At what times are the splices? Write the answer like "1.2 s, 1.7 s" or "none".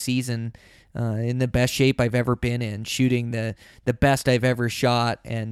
none